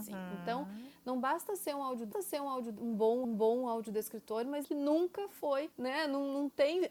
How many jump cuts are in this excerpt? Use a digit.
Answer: 4